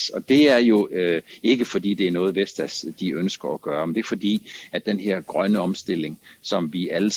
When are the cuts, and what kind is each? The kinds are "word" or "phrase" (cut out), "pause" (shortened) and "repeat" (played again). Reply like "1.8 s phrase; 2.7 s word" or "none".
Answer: none